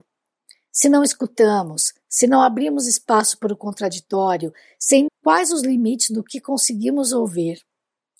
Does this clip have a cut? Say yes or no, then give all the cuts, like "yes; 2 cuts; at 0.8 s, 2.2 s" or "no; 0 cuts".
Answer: yes; 1 cut; at 5.1 s